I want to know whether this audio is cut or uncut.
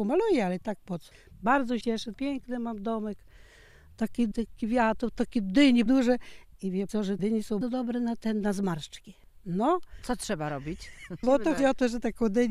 cut